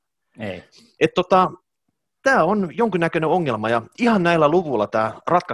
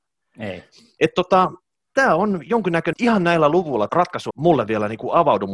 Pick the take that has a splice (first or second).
second